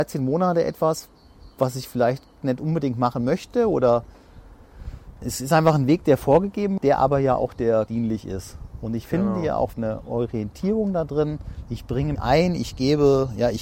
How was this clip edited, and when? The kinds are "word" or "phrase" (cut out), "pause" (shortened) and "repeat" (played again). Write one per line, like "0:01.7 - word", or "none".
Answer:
0:05.2 - word
0:06.8 - word
0:07.9 - word
0:09.7 - word
0:12.1 - word

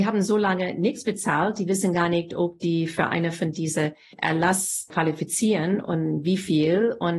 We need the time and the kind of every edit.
none

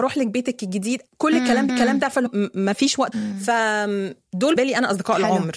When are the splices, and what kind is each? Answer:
0:01.1 - pause
0:01.7 - repeat
0:02.3 - word
0:03.1 - word
0:04.6 - word

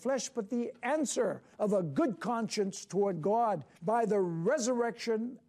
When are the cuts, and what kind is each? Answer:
0:01.5 - pause
0:03.7 - pause

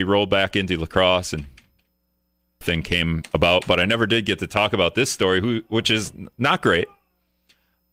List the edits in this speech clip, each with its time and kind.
0:02.6 - phrase

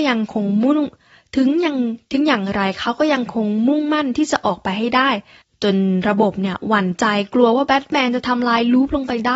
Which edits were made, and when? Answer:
0:05.4 - pause

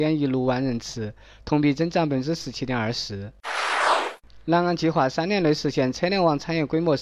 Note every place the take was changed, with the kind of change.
none

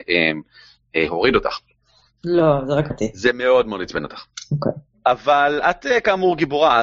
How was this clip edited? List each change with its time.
0:02.9 - phrase

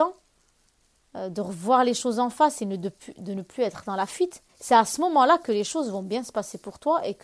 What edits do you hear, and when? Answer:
0:04.5 - pause

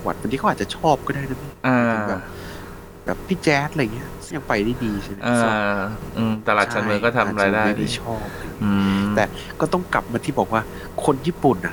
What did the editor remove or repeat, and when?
0:04.3 - phrase

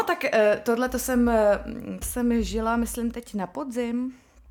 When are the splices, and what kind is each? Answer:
0:02.0 - word

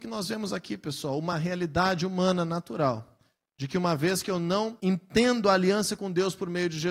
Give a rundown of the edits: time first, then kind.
none

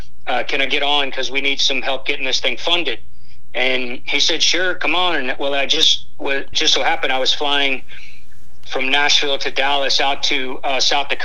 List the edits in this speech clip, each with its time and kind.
0:06.5 - word

